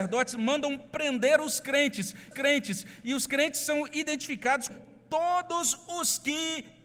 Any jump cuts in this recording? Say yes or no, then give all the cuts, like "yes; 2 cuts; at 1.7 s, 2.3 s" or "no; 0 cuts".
yes; 2 cuts; at 2.3 s, 4.7 s